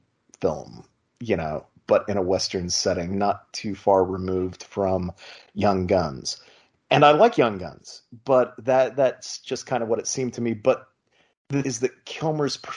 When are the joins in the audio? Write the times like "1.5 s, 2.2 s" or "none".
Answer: 3.1 s, 11.6 s